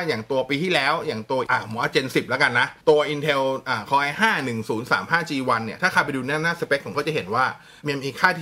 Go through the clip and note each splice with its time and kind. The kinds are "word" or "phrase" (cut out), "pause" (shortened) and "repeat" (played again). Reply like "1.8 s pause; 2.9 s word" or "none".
1.5 s word; 2.8 s pause; 6.9 s word